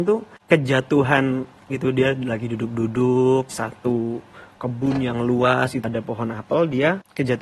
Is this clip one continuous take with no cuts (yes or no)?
no